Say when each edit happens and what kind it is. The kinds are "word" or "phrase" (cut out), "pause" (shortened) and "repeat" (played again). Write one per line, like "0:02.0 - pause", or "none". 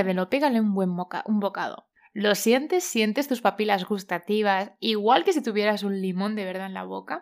0:01.9 - pause

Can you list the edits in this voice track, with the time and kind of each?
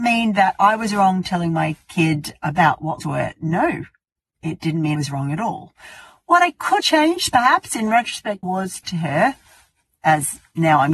0:03.0 - word
0:04.9 - word
0:06.8 - word
0:08.4 - word
0:08.8 - phrase

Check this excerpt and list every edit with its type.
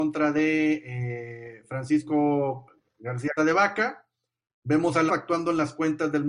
0:03.4 - word
0:05.1 - word

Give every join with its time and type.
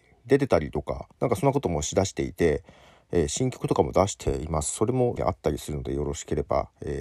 0:01.1 - pause
0:05.2 - word

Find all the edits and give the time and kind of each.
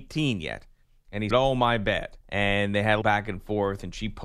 0:01.3 - word
0:02.2 - pause
0:03.0 - word

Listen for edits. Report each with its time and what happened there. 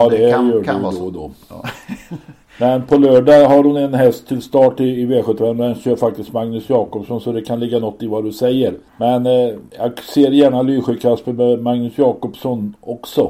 0:08.9 - pause
0:09.7 - pause

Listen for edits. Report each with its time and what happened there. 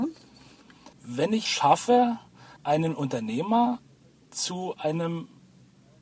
0:00.9 - pause
0:01.5 - word
0:02.6 - pause

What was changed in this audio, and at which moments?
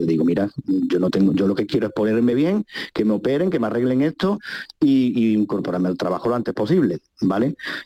none

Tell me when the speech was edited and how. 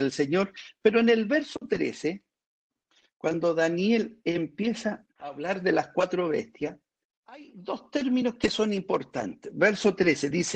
0:02.9 - pause
0:05.1 - pause
0:07.0 - pause

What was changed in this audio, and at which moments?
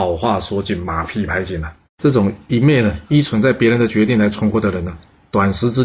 0:01.8 - pause

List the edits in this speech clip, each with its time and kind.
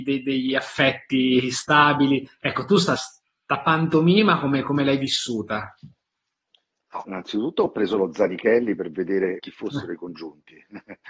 0:03.0 - word
0:07.0 - word
0:09.4 - word

